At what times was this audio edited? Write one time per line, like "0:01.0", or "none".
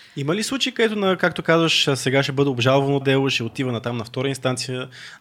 0:03.0

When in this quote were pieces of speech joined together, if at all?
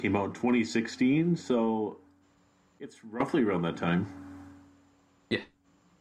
none

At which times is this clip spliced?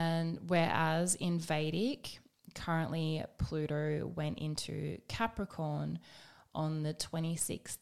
none

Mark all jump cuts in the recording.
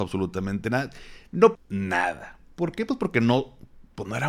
0:01.5

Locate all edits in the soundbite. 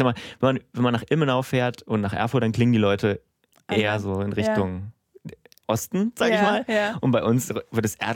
none

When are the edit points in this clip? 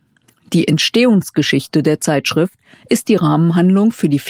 none

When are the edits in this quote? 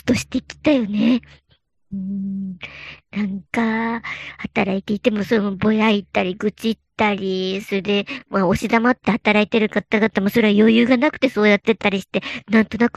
0:03.5

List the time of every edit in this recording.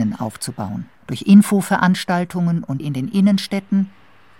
0:01.0
0:02.8

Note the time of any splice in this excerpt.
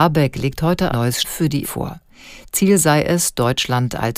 0:00.9
0:01.2
0:01.6

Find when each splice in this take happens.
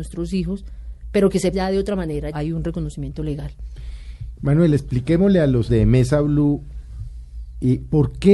0:01.5
0:02.3
0:05.7

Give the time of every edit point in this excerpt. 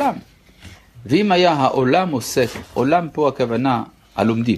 none

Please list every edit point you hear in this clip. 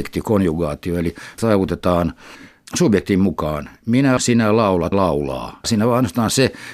0:01.4
0:04.2
0:04.9

